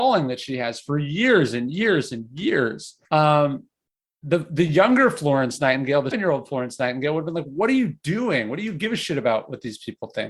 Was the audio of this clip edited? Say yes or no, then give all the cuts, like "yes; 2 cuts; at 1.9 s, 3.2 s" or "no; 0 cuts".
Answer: yes; 2 cuts; at 3.0 s, 6.1 s